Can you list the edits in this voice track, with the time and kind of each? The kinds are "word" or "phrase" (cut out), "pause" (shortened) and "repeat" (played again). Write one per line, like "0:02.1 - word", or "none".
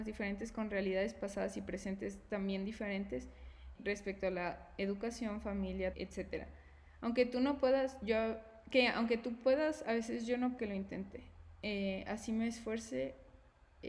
0:03.7 - word
0:05.9 - phrase
0:10.6 - phrase